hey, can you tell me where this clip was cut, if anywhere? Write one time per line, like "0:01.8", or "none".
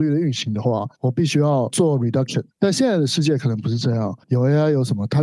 0:00.9
0:02.5
0:04.2